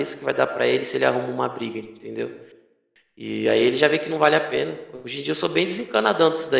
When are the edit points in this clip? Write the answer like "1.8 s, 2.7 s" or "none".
none